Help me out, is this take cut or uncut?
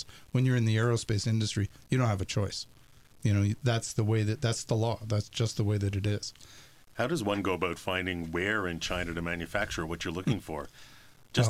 uncut